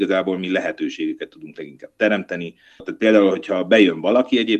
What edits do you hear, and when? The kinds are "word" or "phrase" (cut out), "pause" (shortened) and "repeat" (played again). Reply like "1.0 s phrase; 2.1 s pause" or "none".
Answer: none